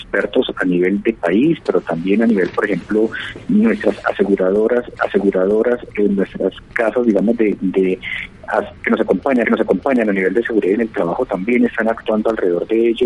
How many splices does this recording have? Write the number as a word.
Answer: four